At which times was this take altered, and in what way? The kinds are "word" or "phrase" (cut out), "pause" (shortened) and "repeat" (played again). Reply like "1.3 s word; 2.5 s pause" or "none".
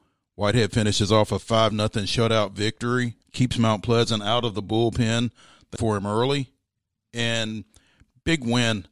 3.2 s word; 5.8 s word